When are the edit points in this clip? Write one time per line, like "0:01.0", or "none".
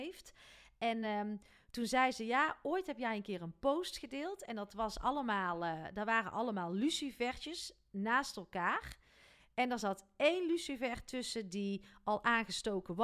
none

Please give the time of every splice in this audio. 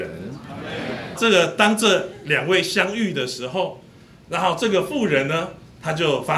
0:01.2

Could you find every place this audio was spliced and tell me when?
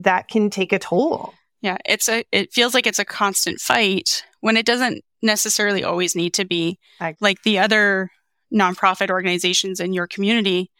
none

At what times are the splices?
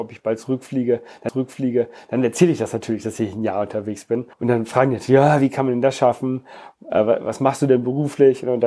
0:01.3
0:04.3

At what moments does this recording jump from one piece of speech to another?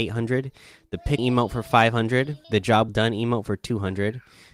0:01.2
0:02.4
0:02.9

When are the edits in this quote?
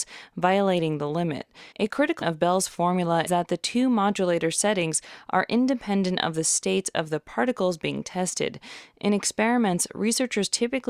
0:01.7
0:02.2
0:03.3

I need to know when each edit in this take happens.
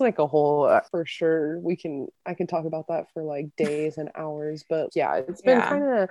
0:02.2
0:04.9

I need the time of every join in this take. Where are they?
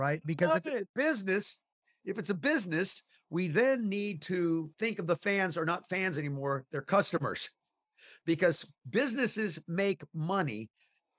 none

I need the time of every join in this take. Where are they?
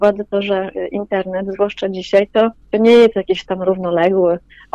none

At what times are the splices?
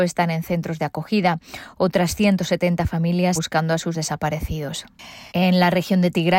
0:03.3
0:03.9
0:05.3

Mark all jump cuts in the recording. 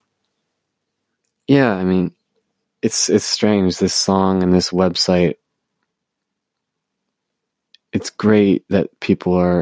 none

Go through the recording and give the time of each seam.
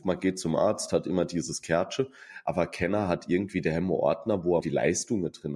0:04.6

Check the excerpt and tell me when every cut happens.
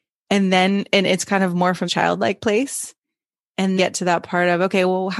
0:01.9
0:03.8

